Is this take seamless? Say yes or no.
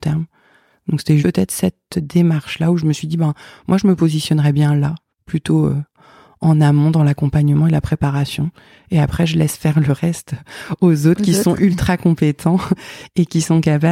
no